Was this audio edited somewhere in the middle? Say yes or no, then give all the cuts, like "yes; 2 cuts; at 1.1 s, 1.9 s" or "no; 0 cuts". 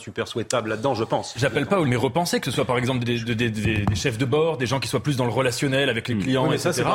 yes; 2 cuts; at 1.8 s, 3.0 s